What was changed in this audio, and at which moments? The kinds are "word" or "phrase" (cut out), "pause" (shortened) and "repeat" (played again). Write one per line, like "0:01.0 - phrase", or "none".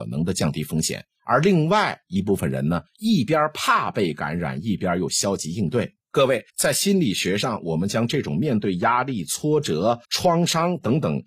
0:01.2 - pause
0:02.9 - pause
0:06.0 - pause
0:06.5 - pause
0:10.0 - pause